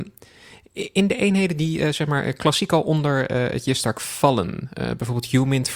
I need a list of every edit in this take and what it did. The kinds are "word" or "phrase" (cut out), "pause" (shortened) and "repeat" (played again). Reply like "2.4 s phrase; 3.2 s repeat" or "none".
none